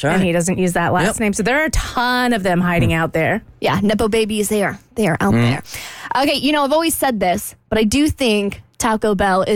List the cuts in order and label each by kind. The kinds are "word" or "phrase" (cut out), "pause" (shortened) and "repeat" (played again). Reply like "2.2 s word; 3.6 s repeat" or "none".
none